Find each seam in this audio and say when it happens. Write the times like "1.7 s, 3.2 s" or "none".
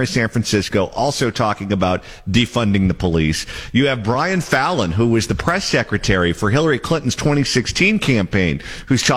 none